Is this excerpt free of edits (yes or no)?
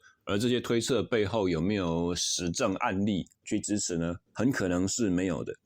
no